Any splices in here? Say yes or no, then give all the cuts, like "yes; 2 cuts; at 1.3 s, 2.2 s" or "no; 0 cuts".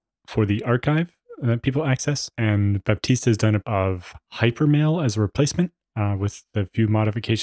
yes; 2 cuts; at 3.6 s, 4.2 s